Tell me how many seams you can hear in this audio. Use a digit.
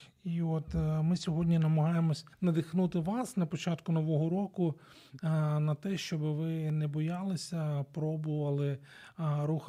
1